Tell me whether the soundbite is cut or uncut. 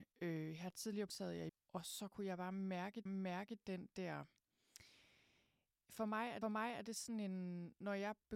cut